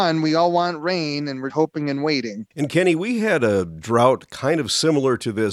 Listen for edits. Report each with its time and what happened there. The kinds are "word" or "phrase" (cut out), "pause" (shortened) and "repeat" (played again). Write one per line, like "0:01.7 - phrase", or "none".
0:01.5 - word
0:02.5 - pause